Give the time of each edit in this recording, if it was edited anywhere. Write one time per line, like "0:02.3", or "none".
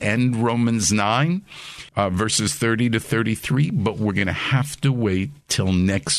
0:01.9